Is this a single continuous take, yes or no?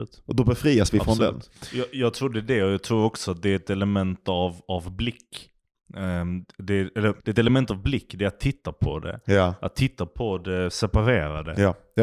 no